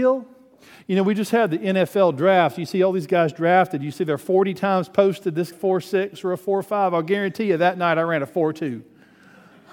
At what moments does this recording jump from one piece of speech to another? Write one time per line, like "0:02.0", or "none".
0:05.5